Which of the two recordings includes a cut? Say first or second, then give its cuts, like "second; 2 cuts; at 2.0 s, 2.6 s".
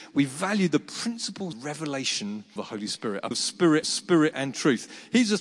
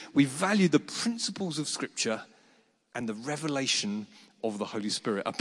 first; 4 cuts; at 1.5 s, 2.6 s, 3.3 s, 3.8 s